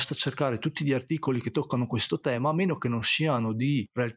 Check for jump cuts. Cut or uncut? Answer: uncut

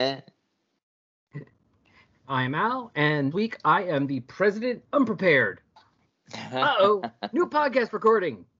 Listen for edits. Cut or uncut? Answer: cut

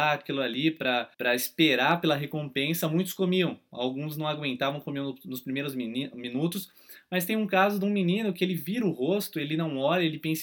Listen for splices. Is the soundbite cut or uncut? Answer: cut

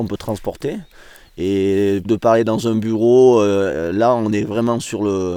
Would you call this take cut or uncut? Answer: cut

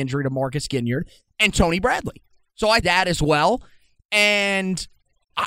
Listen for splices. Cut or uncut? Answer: cut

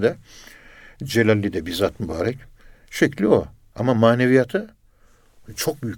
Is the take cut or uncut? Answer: uncut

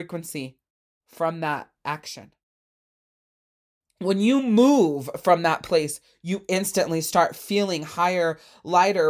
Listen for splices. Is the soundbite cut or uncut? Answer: uncut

